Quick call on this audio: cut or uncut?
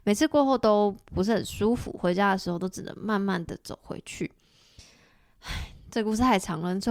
uncut